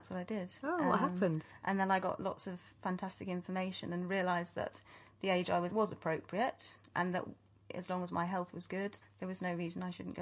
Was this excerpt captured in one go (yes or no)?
no